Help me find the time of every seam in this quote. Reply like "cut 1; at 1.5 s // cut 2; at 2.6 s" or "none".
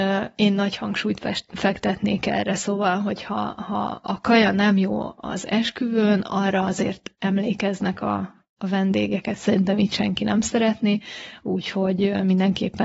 none